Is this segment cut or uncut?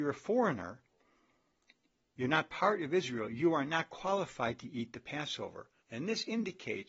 cut